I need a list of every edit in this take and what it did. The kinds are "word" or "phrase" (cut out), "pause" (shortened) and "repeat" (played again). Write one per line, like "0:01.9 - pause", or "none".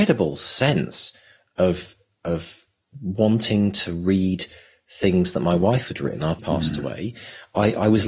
0:06.4 - word